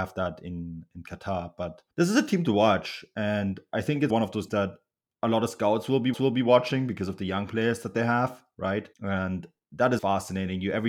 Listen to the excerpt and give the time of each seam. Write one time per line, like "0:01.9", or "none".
0:01.9
0:04.1
0:04.5
0:05.1
0:06.1
0:08.9
0:10.0